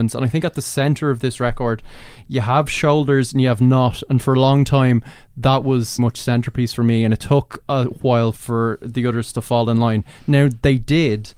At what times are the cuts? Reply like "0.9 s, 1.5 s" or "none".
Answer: 6.0 s